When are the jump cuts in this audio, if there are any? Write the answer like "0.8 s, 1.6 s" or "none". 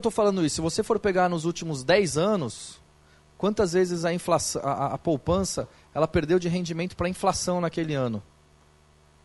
none